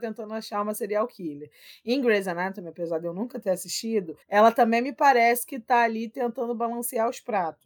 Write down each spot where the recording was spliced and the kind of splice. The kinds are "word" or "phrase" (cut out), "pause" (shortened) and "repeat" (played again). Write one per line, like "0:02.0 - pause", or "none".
0:04.2 - pause